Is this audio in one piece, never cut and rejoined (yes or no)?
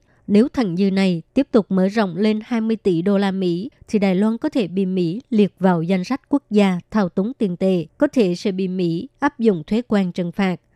no